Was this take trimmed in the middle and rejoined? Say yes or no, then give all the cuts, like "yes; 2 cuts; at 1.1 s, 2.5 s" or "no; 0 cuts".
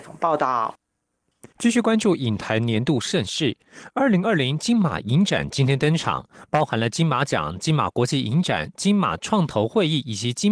yes; 1 cut; at 1.5 s